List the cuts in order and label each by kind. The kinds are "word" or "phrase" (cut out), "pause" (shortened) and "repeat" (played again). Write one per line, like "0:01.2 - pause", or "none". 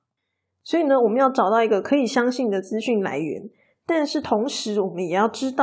none